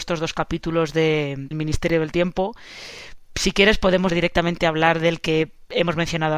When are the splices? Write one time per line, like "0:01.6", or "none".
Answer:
0:01.5
0:04.1